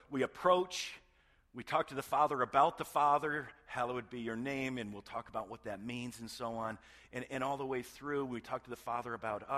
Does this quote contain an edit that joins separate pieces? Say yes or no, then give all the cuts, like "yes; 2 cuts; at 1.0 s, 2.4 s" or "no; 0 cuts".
no; 0 cuts